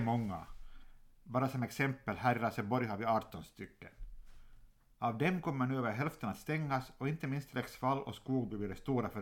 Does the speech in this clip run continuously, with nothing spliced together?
yes; 0 cuts

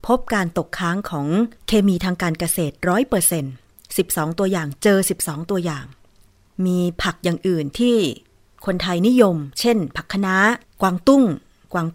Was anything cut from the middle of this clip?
yes; 2 cuts; at 1.6 s, 10.6 s

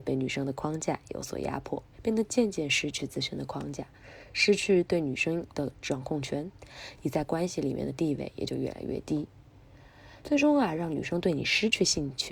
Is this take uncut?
no; 2 cuts; at 1.9 s, 10.2 s

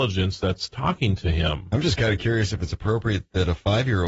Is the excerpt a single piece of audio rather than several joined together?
yes; 0 cuts

